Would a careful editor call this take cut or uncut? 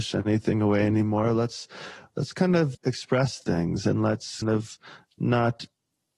cut